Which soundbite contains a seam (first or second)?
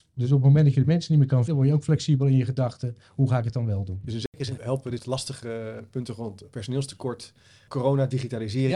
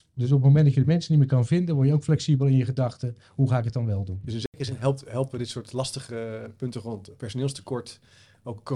first